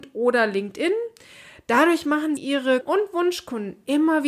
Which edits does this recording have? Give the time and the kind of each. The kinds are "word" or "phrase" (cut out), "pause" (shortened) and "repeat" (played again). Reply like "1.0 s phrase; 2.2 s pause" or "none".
2.4 s word; 2.8 s word